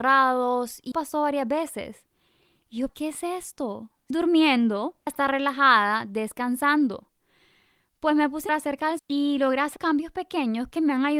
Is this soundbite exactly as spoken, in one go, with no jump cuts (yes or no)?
no